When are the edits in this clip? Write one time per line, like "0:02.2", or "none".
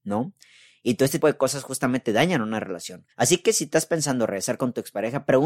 0:01.2
0:03.1